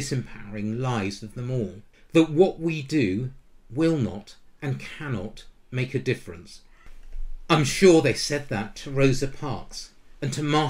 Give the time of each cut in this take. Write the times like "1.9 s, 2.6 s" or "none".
1.9 s